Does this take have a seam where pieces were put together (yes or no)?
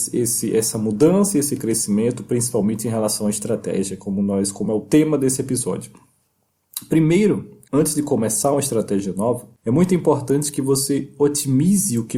yes